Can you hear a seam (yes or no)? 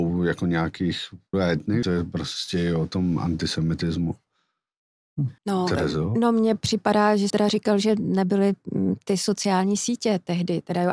yes